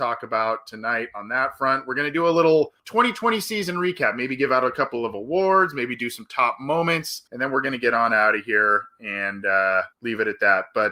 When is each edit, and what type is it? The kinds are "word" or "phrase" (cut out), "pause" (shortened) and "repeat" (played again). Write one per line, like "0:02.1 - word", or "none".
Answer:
0:02.8 - pause
0:07.3 - pause
0:09.9 - pause

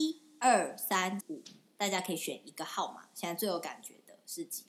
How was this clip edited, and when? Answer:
0:01.2 - word

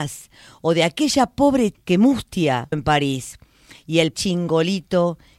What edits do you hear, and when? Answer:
0:01.7 - word
0:02.7 - word
0:04.1 - word

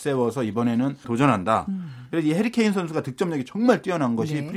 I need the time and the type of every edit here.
0:01.0 - word

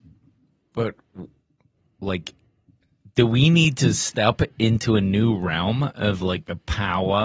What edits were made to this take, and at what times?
none

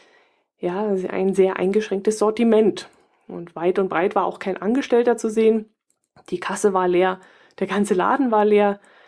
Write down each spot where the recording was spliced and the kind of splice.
none

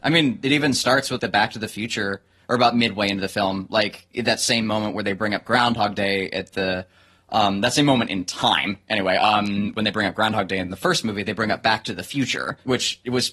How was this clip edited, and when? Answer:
0:01.2 - word

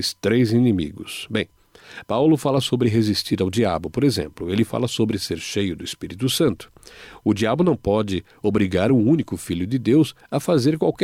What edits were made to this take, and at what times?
none

